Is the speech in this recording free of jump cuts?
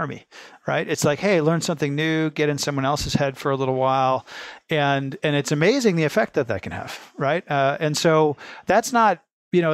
yes; 0 cuts

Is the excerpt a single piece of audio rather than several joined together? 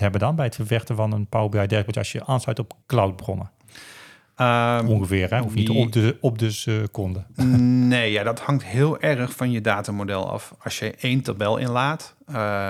no; 1 cut; at 2.8 s

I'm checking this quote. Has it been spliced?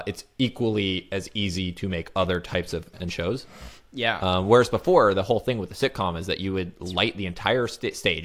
yes; 1 cut; at 2.9 s

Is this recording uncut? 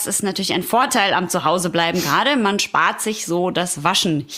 yes; 0 cuts

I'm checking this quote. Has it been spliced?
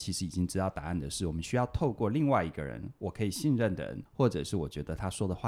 yes; 1 cut; at 4.1 s

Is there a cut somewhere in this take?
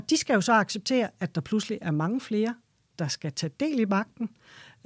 no; 0 cuts

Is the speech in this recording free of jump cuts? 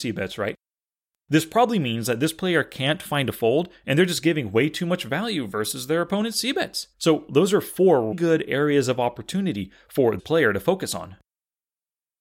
no; 3 cuts; at 6.9 s, 8.1 s, 10.2 s

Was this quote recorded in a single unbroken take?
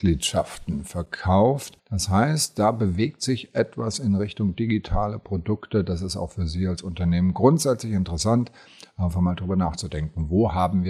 yes; 0 cuts

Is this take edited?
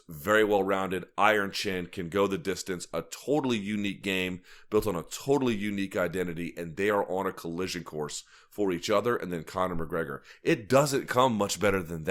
no; 0 cuts

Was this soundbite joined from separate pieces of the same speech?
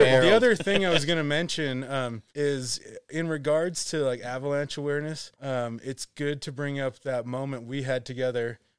yes; 2 cuts; at 2.3 s, 5.3 s

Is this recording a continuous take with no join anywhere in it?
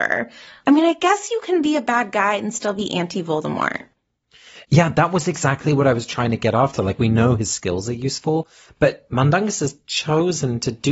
yes; 0 cuts

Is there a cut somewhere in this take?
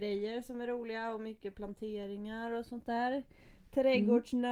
no; 0 cuts

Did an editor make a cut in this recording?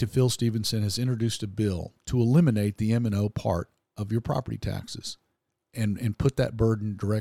no; 0 cuts

